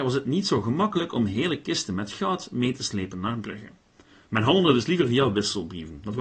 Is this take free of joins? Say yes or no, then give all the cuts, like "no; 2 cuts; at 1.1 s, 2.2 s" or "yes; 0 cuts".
yes; 0 cuts